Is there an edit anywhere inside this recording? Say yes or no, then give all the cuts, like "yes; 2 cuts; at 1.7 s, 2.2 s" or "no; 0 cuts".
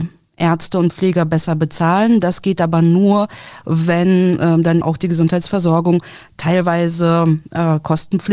yes; 1 cut; at 4.8 s